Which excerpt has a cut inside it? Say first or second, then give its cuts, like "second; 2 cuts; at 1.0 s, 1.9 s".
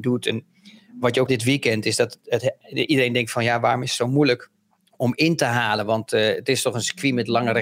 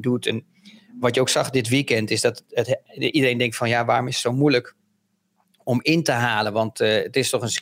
first; 2 cuts; at 1.3 s, 4.7 s